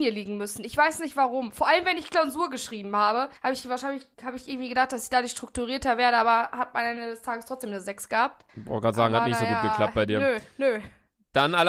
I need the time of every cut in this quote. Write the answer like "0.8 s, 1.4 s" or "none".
3.4 s, 4.1 s, 8.5 s